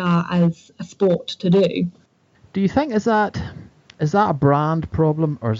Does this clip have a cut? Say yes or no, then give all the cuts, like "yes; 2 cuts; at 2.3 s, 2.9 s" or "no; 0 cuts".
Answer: no; 0 cuts